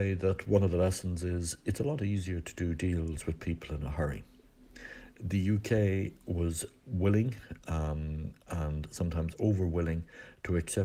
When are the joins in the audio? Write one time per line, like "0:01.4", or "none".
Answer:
none

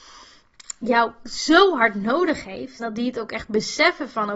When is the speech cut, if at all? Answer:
0:02.8

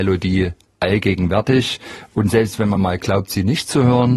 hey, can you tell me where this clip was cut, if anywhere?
none

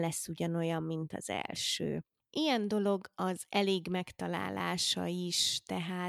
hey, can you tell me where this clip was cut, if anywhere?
none

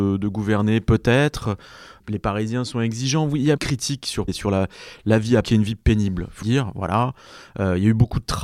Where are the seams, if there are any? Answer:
0:03.6
0:04.3
0:05.4
0:06.4

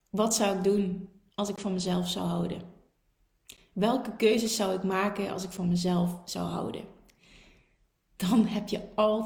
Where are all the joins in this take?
none

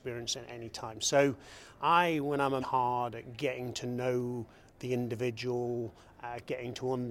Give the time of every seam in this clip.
0:02.6

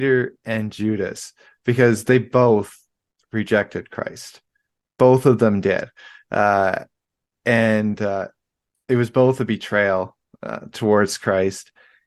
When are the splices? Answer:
none

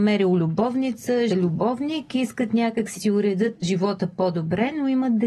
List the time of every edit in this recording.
0:01.3
0:03.0
0:03.6

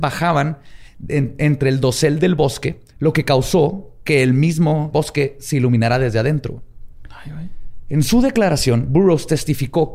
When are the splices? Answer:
0:02.9
0:04.9

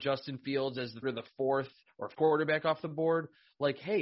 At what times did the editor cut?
0:01.0
0:02.1

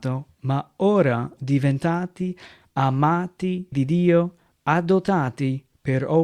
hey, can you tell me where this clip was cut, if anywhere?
0:01.4
0:03.7

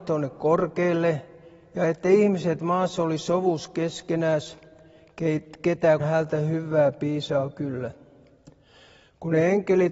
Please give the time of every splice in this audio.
0:06.0

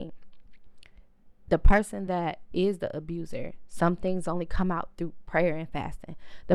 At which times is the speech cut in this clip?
none

